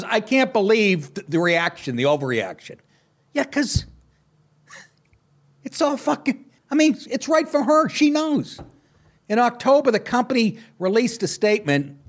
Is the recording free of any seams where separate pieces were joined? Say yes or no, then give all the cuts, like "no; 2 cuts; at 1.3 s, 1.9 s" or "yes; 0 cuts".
no; 1 cut; at 6.6 s